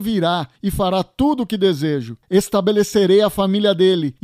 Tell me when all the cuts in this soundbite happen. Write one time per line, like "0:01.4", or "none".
none